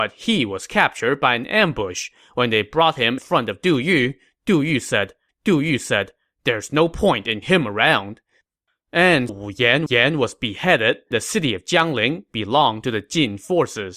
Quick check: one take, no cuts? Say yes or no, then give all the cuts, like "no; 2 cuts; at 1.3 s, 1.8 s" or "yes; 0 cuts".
no; 6 cuts; at 3.2 s, 5.3 s, 7.4 s, 9.3 s, 9.9 s, 11.1 s